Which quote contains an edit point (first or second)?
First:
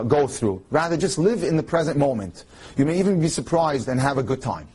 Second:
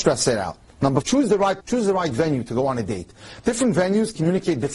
second